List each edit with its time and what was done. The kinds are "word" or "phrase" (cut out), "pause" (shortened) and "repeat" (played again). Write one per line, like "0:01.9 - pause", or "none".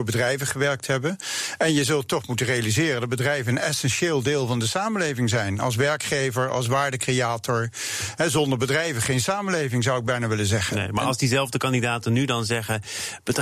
none